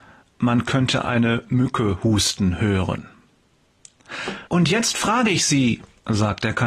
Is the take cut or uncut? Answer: cut